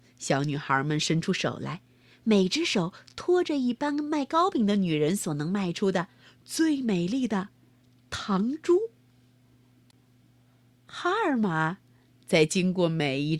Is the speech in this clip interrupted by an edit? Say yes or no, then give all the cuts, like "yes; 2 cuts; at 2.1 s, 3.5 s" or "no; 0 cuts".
no; 0 cuts